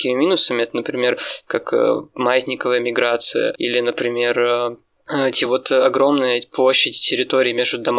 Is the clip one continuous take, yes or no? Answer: yes